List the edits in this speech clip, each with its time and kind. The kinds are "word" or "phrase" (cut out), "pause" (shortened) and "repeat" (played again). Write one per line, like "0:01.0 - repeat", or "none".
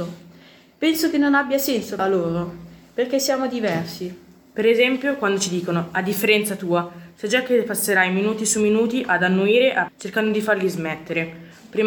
0:02.0 - phrase
0:09.9 - word

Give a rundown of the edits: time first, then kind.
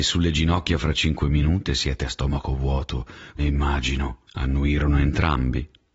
0:01.7 - word
0:03.4 - word
0:04.3 - pause

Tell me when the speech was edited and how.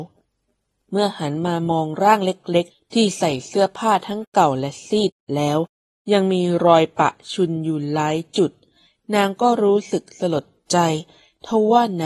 0:02.7 - pause

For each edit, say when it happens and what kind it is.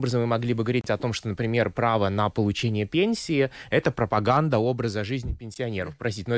none

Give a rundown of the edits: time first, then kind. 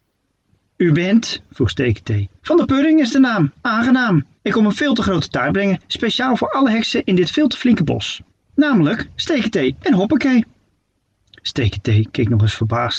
0:02.4 - pause
0:04.4 - pause
0:08.3 - pause

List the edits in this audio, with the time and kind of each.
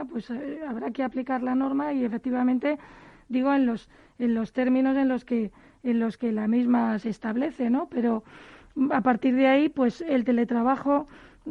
none

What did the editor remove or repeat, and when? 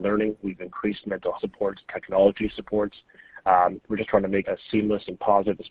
0:01.4 - word
0:04.4 - word

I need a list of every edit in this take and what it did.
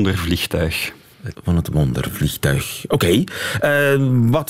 0:01.3 - word

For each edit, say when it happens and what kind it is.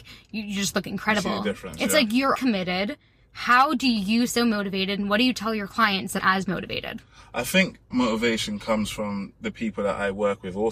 0:02.3 - word
0:04.3 - word
0:06.2 - word
0:07.9 - word

